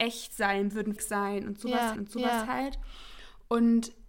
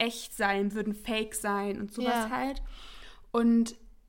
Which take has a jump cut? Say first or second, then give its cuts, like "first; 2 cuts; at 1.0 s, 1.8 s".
first; 2 cuts; at 1.0 s, 2.0 s